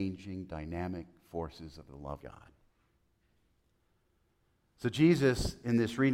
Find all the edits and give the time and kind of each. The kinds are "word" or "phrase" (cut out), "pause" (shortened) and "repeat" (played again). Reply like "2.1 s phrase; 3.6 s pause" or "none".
2.2 s word

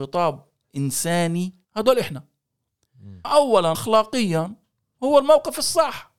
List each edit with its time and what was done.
1.6 s word; 3.2 s word; 3.7 s word

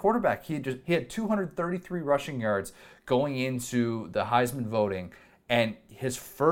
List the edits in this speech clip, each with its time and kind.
none

